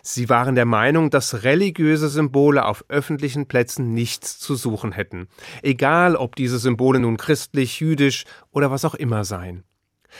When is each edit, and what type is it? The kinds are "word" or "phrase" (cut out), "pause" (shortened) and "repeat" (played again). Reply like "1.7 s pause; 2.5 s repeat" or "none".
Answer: none